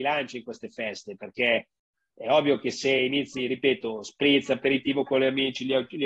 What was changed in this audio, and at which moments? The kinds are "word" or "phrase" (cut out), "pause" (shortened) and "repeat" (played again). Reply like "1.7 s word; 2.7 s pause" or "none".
none